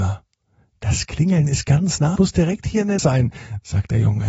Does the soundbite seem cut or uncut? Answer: cut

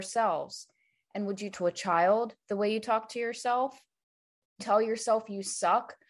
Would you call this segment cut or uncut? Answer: cut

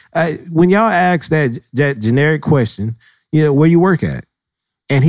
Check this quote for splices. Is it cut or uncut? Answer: uncut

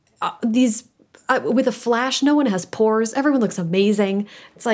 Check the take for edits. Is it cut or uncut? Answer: uncut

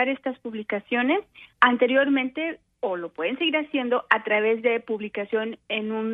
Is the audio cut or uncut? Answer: cut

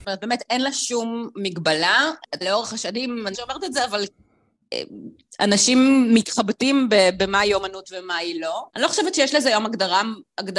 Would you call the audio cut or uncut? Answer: cut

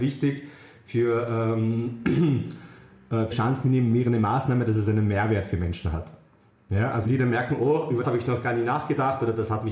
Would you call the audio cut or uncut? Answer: cut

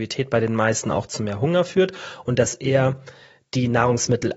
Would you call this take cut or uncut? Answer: uncut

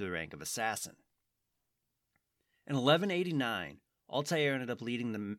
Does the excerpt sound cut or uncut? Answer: uncut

